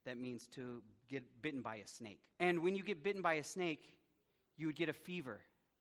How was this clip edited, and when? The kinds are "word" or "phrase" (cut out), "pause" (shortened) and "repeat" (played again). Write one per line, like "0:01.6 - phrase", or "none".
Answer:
0:01.0 - pause
0:02.3 - pause